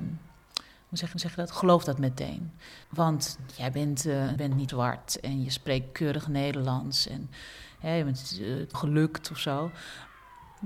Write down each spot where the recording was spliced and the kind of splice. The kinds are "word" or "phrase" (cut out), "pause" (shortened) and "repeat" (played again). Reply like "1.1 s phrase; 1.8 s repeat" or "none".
1.1 s repeat; 2.8 s pause; 4.4 s phrase; 4.7 s word; 8.7 s phrase